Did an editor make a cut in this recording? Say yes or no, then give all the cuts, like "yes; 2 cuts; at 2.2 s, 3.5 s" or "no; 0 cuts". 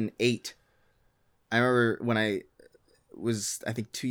no; 0 cuts